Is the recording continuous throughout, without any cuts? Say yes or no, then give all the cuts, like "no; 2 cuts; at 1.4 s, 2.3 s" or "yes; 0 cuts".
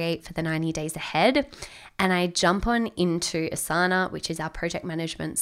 yes; 0 cuts